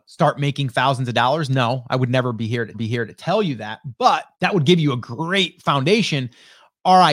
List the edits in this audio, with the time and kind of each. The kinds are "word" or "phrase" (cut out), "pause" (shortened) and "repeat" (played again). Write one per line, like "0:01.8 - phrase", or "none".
0:02.7 - repeat
0:04.3 - pause